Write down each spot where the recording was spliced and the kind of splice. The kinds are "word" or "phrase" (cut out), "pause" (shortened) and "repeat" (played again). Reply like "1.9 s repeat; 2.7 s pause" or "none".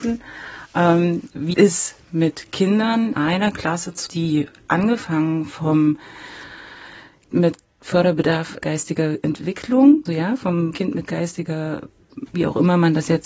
1.5 s word; 3.1 s word; 4.1 s word; 7.3 s word; 8.6 s word; 10.1 s word; 10.7 s word; 12.3 s word